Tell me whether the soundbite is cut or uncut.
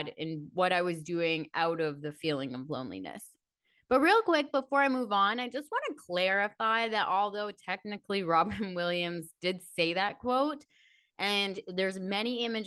uncut